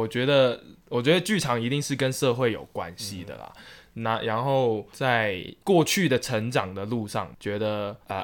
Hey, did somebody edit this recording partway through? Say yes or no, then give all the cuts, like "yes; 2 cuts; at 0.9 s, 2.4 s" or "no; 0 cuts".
yes; 1 cut; at 5.6 s